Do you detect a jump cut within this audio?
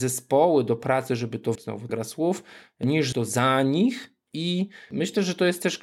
yes; 3 cuts; at 1.5 s, 1.9 s, 3.1 s

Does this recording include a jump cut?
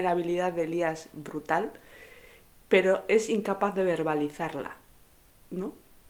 no; 0 cuts

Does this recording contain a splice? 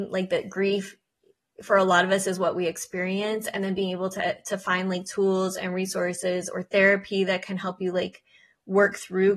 no; 0 cuts

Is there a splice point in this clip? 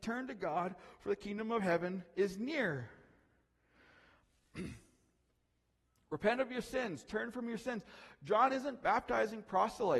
no; 0 cuts

